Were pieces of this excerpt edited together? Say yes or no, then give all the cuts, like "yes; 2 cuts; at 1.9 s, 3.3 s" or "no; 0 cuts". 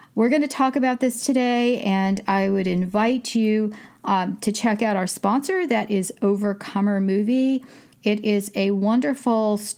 no; 0 cuts